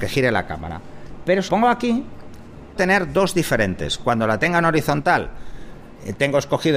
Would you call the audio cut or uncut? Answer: cut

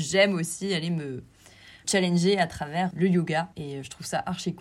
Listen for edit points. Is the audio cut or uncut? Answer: cut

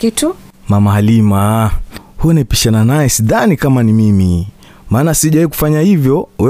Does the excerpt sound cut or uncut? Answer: uncut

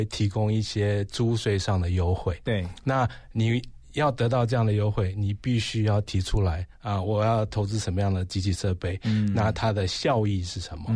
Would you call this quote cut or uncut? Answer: cut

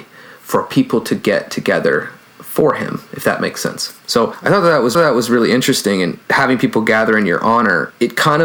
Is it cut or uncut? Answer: cut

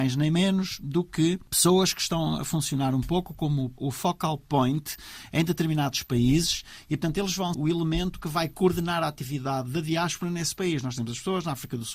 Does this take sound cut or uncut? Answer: cut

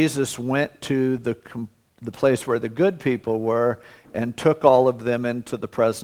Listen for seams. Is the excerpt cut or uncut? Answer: uncut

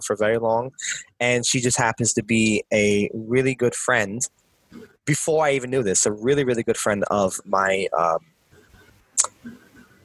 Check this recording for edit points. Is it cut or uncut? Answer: uncut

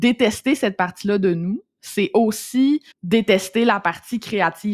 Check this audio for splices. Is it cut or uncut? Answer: cut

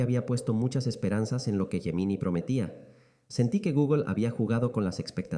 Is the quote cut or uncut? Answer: uncut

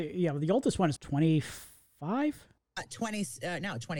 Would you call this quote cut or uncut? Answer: cut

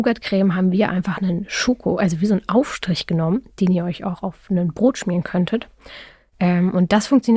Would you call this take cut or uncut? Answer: uncut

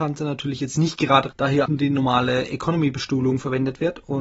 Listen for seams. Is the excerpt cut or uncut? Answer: cut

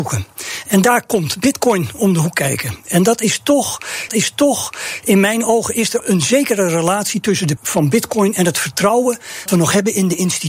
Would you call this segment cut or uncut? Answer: cut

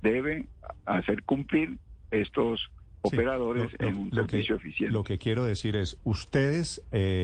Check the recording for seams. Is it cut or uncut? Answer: uncut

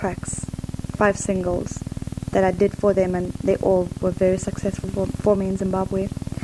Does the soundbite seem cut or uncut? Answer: uncut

